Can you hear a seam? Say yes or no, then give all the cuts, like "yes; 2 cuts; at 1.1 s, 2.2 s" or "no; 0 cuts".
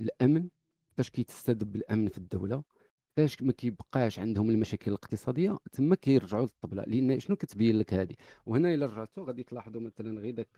no; 0 cuts